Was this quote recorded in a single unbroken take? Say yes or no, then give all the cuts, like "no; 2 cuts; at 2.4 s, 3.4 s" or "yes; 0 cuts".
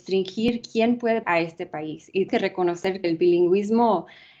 no; 3 cuts; at 1.2 s, 2.3 s, 3.0 s